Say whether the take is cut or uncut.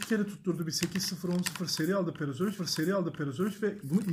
cut